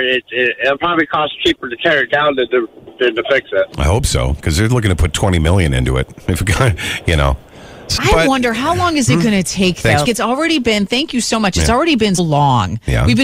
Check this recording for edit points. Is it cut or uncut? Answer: cut